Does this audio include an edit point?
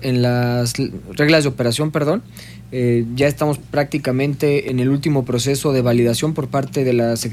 no; 0 cuts

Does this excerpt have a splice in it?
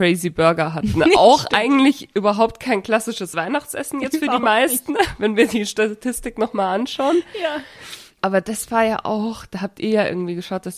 no; 0 cuts

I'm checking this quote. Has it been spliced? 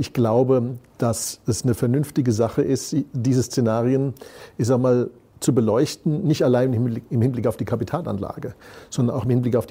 no; 0 cuts

